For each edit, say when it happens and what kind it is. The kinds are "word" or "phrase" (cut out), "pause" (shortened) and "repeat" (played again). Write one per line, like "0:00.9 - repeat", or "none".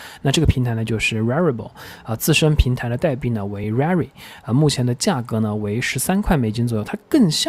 none